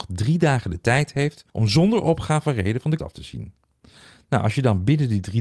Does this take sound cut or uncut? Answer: cut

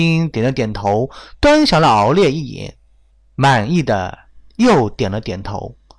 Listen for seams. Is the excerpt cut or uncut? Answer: uncut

